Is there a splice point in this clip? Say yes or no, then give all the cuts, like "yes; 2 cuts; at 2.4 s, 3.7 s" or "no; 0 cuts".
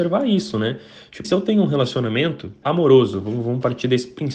yes; 2 cuts; at 1.2 s, 2.6 s